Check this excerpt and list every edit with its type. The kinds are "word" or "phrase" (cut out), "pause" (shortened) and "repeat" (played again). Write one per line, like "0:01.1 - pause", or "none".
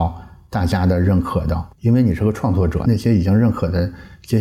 0:01.7 - pause